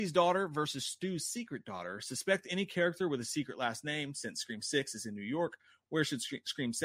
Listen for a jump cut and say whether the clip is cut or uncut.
uncut